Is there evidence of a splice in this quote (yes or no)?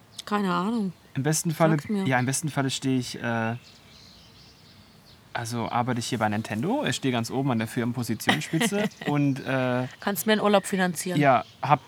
no